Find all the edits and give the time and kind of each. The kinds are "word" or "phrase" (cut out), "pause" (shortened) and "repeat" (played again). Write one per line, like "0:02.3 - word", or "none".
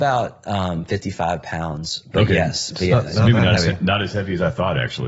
none